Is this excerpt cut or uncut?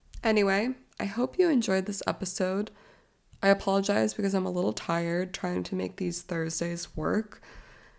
uncut